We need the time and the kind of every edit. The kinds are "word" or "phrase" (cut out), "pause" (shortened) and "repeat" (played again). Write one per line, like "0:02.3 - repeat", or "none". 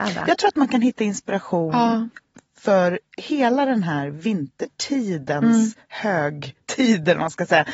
none